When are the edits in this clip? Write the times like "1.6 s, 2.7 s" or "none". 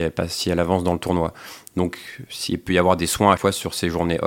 3.4 s